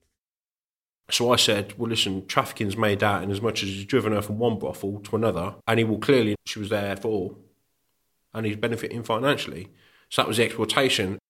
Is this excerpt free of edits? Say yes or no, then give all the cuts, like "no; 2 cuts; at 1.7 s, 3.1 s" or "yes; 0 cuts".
no; 2 cuts; at 5.6 s, 6.3 s